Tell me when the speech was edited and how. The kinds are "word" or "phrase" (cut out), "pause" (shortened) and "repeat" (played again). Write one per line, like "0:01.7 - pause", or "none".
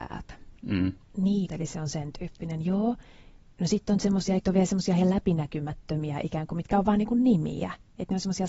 0:01.5 - word
0:04.4 - word